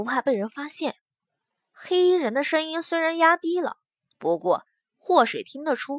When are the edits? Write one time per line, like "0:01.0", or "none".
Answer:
none